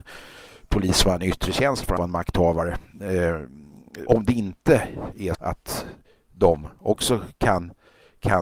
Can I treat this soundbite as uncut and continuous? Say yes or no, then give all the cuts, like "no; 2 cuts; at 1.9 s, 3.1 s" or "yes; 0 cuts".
no; 3 cuts; at 2.0 s, 4.1 s, 5.3 s